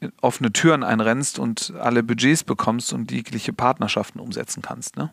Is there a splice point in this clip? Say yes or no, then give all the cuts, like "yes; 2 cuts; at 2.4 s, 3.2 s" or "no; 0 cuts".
no; 0 cuts